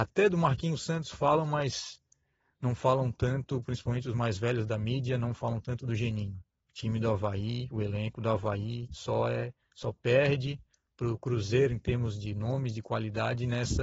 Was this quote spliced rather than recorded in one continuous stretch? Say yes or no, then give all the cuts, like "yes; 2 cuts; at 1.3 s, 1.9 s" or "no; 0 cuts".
no; 0 cuts